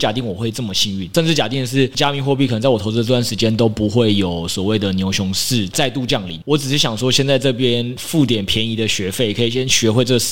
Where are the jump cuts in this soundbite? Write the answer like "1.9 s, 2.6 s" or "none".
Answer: none